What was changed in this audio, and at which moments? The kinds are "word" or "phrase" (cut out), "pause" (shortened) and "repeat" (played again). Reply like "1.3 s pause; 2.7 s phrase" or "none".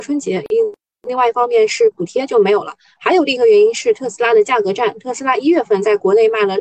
none